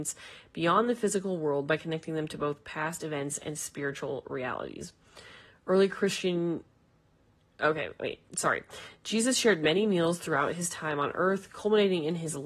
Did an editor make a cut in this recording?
no; 0 cuts

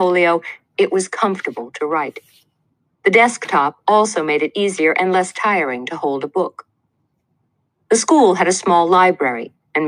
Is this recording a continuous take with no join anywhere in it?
yes; 0 cuts

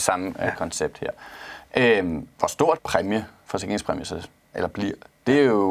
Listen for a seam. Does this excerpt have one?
yes; 2 cuts; at 2.8 s, 4.5 s

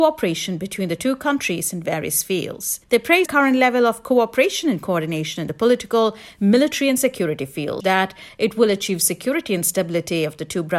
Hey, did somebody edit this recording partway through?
yes; 3 cuts; at 2.8 s, 3.3 s, 7.8 s

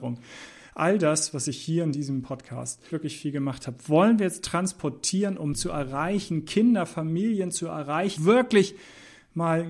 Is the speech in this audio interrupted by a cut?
yes; 3 cuts; at 2.9 s, 5.5 s, 8.2 s

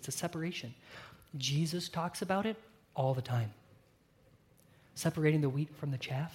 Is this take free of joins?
yes; 0 cuts

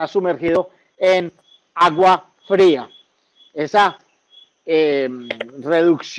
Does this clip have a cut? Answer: no; 0 cuts

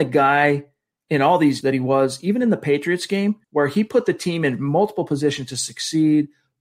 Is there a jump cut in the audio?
yes; 2 cuts; at 1.6 s, 3.4 s

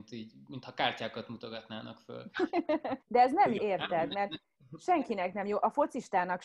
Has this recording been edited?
yes; 2 cuts; at 3.0 s, 3.6 s

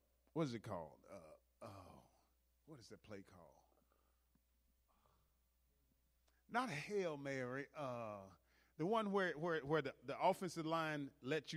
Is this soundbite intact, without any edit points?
yes; 0 cuts

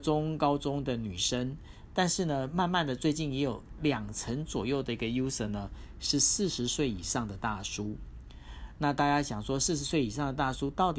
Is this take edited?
no; 0 cuts

